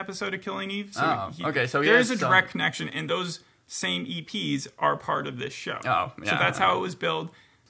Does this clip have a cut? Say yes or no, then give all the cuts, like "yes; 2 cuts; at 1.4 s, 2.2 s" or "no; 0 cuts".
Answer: no; 0 cuts